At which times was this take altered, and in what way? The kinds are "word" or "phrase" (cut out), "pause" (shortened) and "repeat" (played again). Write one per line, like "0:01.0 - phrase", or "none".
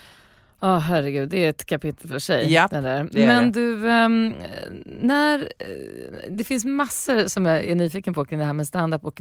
none